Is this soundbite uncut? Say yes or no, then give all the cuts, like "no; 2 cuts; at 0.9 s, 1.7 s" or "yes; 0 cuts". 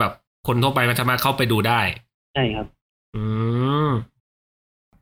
yes; 0 cuts